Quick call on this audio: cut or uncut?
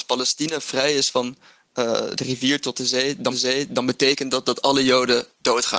cut